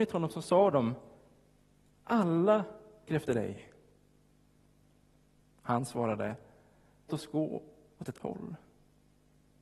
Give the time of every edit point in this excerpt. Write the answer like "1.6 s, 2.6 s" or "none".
3.1 s, 7.1 s, 8.2 s